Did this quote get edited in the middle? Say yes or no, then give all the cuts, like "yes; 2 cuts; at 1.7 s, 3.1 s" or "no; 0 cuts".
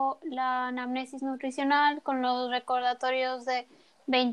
no; 0 cuts